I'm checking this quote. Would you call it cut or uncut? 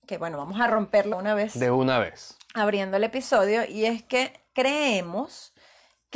cut